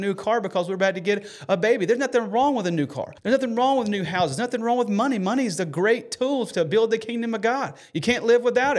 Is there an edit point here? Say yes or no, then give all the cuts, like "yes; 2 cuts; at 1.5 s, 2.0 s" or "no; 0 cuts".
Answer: yes; 1 cut; at 3.2 s